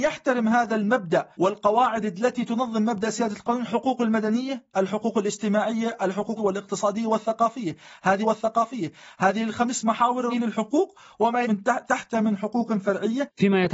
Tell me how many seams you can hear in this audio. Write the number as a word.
six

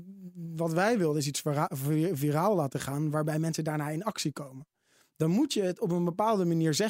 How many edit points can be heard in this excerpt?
zero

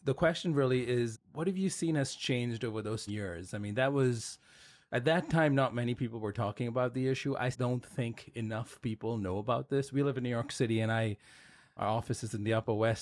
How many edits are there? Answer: four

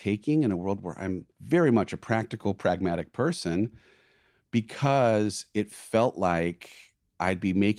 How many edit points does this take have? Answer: one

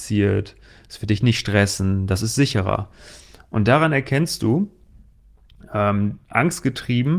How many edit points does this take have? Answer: zero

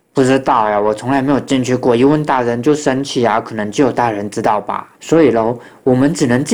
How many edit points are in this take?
one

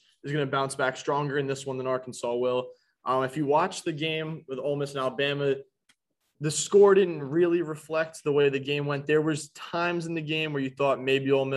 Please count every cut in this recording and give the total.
zero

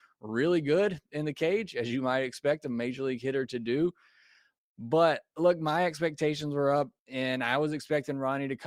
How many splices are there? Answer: one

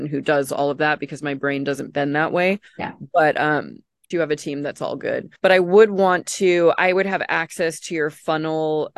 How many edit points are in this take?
three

